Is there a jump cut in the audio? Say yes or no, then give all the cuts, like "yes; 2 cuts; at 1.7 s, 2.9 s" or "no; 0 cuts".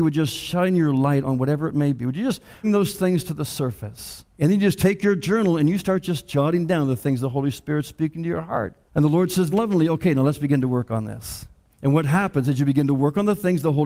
yes; 5 cuts; at 2.6 s, 4.3 s, 8.9 s, 9.5 s, 11.7 s